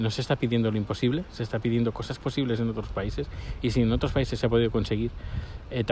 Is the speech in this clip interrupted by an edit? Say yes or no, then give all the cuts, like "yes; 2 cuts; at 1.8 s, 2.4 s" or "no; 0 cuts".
yes; 1 cut; at 2.2 s